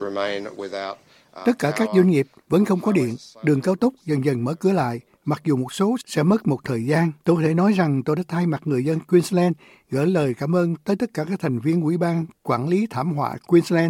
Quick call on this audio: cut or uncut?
cut